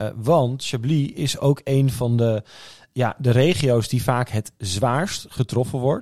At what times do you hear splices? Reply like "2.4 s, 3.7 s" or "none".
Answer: none